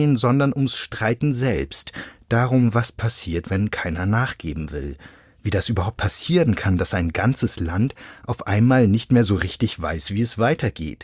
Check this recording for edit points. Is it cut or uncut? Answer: uncut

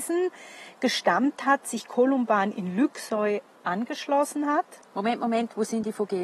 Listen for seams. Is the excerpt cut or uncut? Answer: uncut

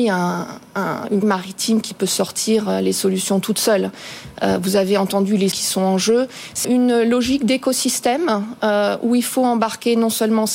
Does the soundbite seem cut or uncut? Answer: cut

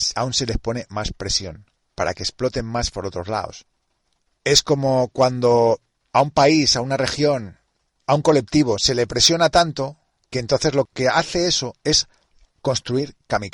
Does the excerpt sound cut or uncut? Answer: uncut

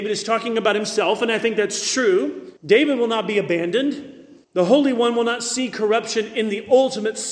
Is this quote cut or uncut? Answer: cut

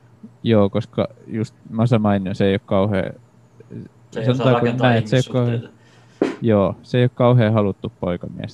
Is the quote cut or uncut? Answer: cut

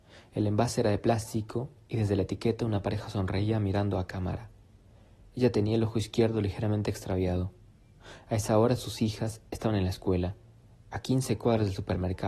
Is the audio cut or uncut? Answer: uncut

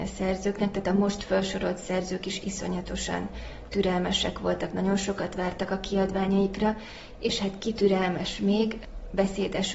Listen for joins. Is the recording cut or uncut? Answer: uncut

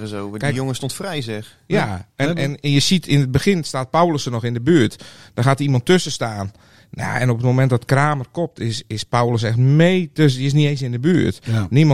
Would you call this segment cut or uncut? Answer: uncut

